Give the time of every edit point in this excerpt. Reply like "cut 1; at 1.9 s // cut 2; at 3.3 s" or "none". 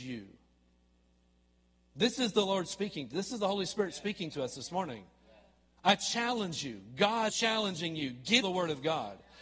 cut 1; at 7.3 s // cut 2; at 8.4 s